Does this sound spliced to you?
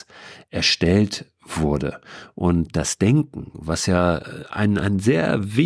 no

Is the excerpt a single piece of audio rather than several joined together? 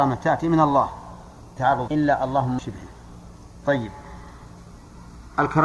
no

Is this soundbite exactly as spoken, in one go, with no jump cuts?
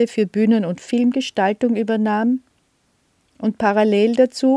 yes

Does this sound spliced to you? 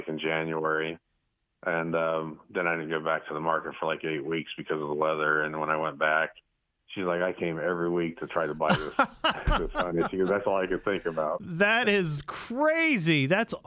no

